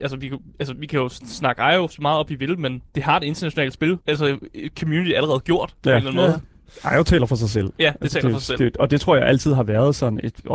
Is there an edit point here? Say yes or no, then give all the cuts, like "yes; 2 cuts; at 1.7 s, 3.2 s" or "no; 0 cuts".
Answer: yes; 2 cuts; at 2.9 s, 4.0 s